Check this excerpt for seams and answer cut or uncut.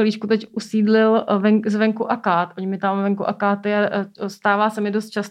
uncut